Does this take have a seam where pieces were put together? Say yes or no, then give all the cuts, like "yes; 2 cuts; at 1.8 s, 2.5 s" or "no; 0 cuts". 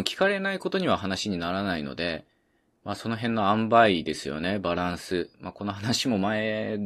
no; 0 cuts